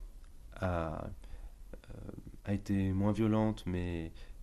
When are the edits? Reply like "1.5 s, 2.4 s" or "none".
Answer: none